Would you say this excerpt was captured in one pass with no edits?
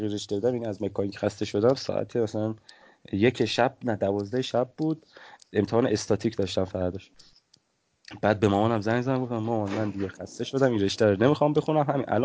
yes; 0 cuts

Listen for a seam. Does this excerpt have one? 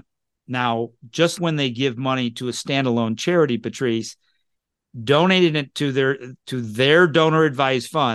yes; 1 cut; at 1.4 s

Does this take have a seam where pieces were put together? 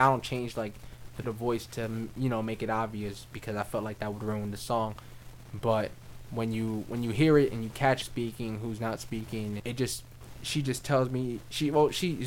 yes; 3 cuts; at 1.2 s, 8.0 s, 9.6 s

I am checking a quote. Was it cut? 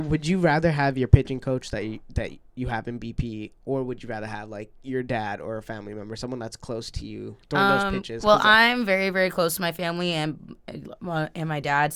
no; 0 cuts

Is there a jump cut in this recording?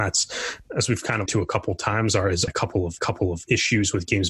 yes; 3 cuts; at 1.3 s, 2.5 s, 3.0 s

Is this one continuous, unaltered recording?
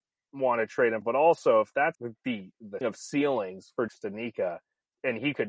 no; 4 cuts; at 1.0 s, 1.9 s, 2.8 s, 3.9 s

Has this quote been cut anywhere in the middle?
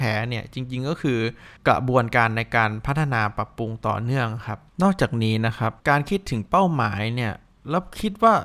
yes; 3 cuts; at 1.6 s, 4.7 s, 5.8 s

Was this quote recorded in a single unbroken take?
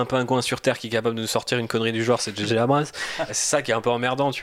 no; 1 cut; at 3.3 s

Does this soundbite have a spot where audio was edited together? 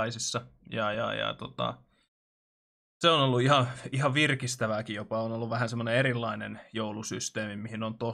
no; 0 cuts

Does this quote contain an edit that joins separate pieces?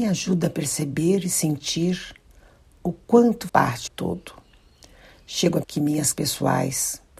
yes; 4 cuts; at 3.5 s, 3.9 s, 5.6 s, 6.1 s

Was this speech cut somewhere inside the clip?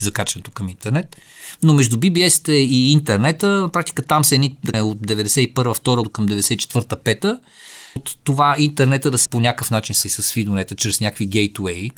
yes; 5 cuts; at 4.7 s, 6.0 s, 8.0 s, 9.2 s, 10.0 s

